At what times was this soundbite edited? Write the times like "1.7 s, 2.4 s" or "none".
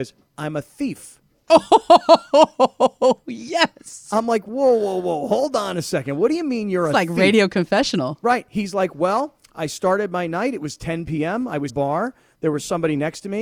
11.7 s